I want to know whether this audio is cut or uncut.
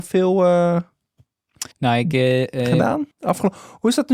cut